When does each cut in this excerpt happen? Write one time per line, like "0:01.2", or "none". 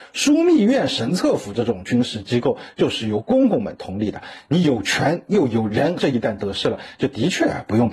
0:06.0